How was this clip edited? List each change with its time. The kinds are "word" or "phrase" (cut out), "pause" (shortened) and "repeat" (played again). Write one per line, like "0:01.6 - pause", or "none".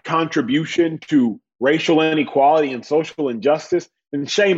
none

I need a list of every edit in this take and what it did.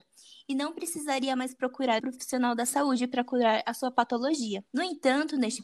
0:02.0 - word
0:04.7 - pause

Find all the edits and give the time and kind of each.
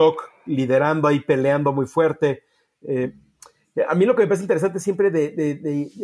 none

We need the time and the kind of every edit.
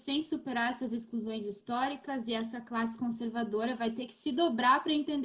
none

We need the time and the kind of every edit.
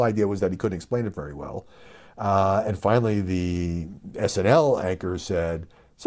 none

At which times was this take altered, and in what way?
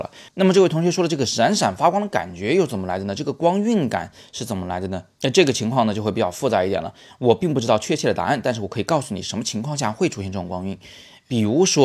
0:05.1 - pause

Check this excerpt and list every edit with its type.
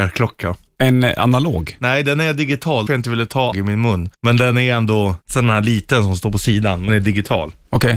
0:02.9 - phrase
0:03.5 - word
0:04.1 - pause
0:05.2 - pause
0:06.9 - word

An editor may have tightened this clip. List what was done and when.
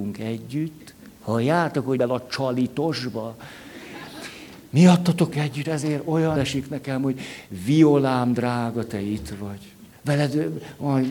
0:01.2 - pause
0:02.0 - word
0:05.3 - word
0:05.6 - word
0:06.4 - word
0:09.9 - pause

